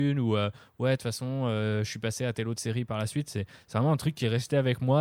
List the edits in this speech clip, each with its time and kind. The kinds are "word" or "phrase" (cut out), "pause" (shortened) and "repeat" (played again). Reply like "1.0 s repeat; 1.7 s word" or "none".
none